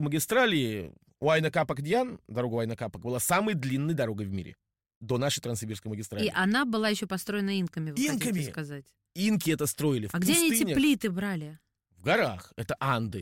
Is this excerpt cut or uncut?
uncut